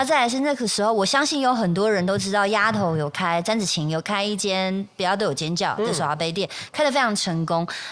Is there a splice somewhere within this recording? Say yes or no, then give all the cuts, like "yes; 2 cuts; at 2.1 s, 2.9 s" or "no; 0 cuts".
no; 0 cuts